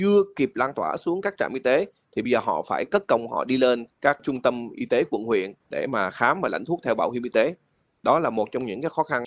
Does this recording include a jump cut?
no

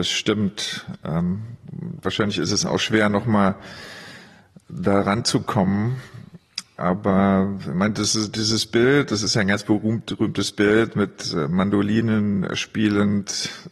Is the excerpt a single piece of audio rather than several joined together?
yes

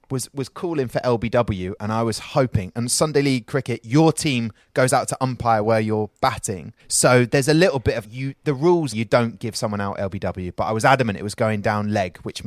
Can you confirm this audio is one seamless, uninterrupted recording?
no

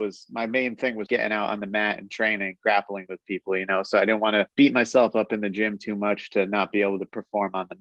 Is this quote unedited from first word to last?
no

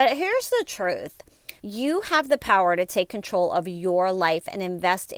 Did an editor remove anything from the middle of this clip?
yes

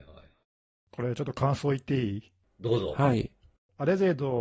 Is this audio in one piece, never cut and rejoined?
yes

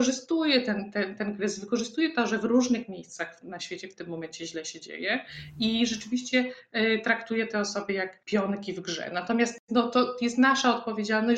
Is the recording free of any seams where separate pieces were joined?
no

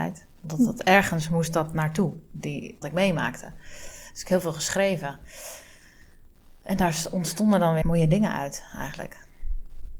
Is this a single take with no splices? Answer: no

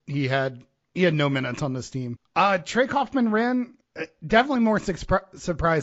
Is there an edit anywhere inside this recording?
no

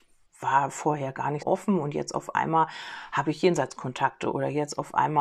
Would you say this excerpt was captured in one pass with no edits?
no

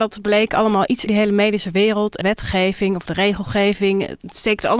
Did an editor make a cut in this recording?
yes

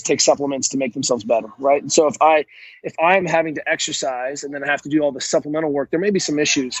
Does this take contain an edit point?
no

